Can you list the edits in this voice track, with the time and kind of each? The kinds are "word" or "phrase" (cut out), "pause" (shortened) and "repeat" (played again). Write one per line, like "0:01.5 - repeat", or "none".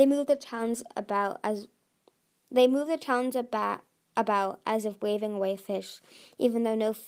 none